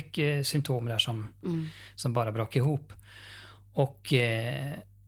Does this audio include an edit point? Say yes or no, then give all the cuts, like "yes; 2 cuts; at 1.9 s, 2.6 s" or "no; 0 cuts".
no; 0 cuts